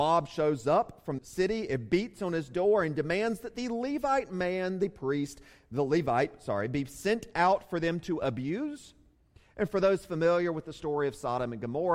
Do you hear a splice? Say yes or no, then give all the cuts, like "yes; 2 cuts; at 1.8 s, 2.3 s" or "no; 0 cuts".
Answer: yes; 1 cut; at 1.2 s